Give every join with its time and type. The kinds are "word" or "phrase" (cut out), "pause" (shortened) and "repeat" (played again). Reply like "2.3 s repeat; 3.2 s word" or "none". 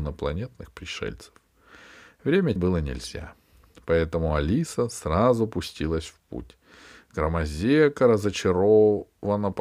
2.6 s word